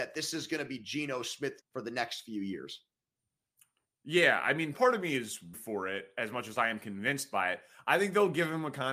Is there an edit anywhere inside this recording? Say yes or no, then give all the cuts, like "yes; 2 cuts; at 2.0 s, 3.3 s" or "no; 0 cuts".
yes; 3 cuts; at 1.6 s, 4.7 s, 5.5 s